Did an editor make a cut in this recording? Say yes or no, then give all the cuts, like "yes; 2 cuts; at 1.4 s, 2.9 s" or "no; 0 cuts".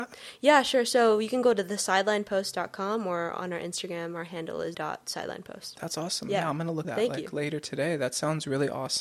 yes; 2 cuts; at 4.7 s, 6.8 s